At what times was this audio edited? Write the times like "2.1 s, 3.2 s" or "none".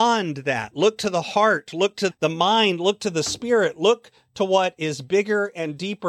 none